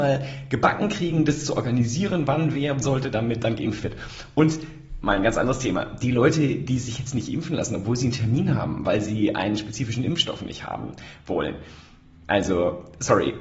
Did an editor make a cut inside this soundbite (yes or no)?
yes